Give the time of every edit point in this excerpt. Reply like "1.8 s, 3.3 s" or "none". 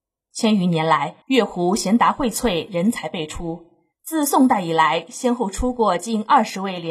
1.2 s, 3.9 s

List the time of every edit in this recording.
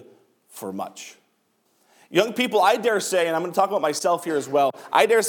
1.7 s

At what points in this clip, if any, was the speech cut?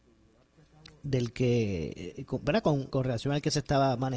2.9 s

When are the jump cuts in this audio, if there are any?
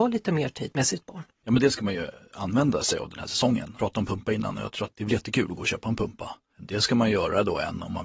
1.3 s

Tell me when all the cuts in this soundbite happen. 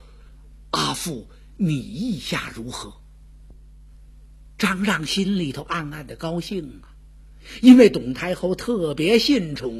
none

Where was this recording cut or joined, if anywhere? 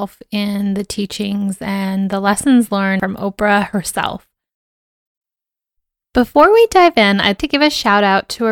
7.4 s

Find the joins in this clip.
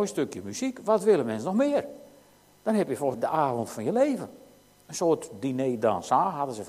3.1 s

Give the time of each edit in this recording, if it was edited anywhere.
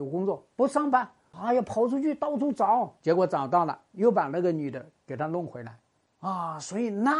none

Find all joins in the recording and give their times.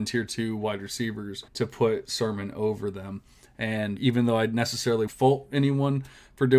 1.5 s, 4.0 s, 5.1 s

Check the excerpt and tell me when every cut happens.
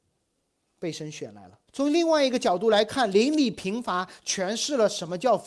1.7 s

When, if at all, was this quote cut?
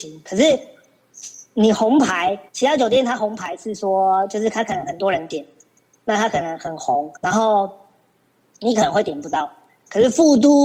2.5 s, 7.2 s

